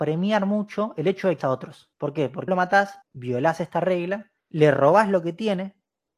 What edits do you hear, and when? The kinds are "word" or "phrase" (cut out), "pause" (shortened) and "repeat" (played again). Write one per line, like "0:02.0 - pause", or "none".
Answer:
0:01.4 - word
0:01.9 - pause
0:02.5 - word
0:03.0 - pause
0:04.4 - pause